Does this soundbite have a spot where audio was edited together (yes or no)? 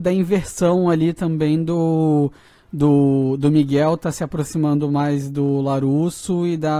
no